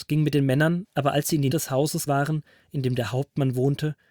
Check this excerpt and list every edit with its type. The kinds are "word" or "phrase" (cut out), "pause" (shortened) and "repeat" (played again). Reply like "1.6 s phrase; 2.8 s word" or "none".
1.5 s word; 2.1 s word

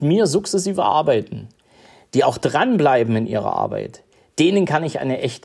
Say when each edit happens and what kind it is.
none

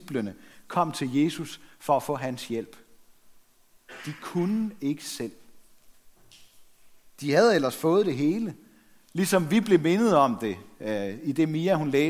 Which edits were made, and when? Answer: none

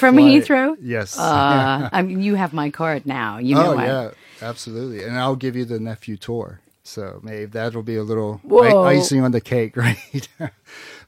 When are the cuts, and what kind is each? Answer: none

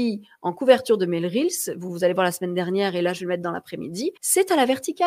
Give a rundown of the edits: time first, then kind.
4.2 s pause

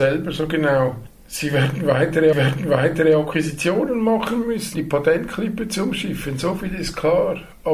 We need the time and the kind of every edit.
2.3 s repeat; 4.7 s word

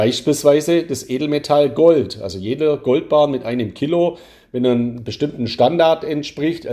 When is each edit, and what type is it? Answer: none

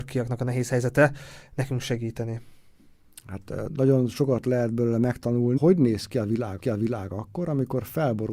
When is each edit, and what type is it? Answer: 3.7 s word; 5.6 s word; 6.6 s repeat

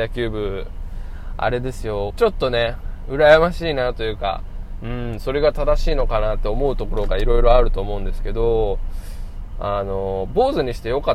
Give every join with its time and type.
2.1 s phrase

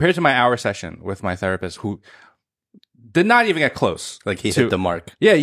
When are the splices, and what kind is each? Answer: none

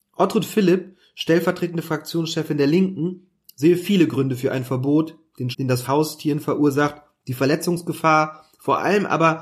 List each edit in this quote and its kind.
5.5 s word; 5.8 s phrase

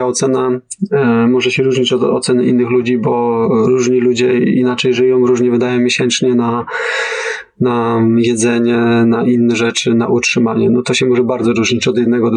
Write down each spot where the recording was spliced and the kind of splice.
none

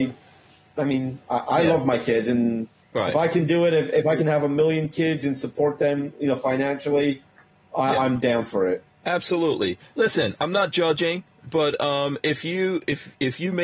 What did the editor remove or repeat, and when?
1.2 s pause; 7.4 s pause

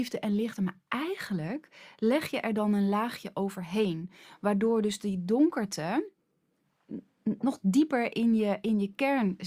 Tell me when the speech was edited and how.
none

